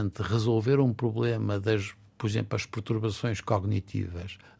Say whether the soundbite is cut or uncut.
uncut